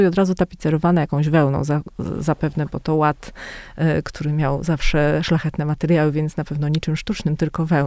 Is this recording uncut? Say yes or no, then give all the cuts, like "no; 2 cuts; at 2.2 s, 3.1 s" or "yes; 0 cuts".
yes; 0 cuts